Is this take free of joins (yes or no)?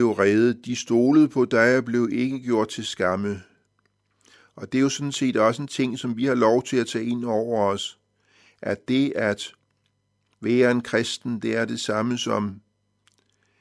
yes